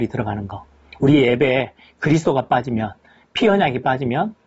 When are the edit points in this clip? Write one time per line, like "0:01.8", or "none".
none